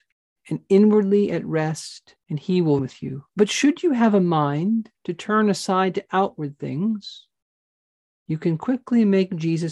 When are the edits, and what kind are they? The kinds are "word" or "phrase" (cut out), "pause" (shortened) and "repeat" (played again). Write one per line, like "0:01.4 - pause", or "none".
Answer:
0:02.2 - pause
0:02.8 - word
0:03.3 - pause
0:04.9 - pause